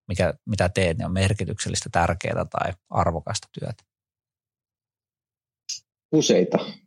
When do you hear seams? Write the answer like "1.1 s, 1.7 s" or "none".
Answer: none